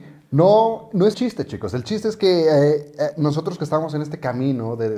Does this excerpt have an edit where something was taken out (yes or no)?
yes